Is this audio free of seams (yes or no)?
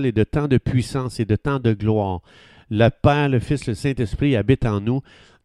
yes